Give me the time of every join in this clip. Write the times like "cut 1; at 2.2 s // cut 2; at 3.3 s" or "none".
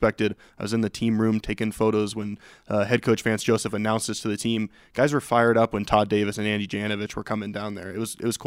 none

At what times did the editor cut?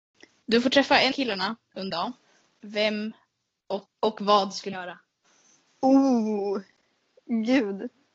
cut 1; at 1.1 s // cut 2; at 1.9 s // cut 3; at 3.5 s // cut 4; at 3.9 s // cut 5; at 4.7 s

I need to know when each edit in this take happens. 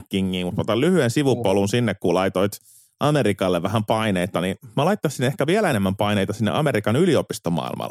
none

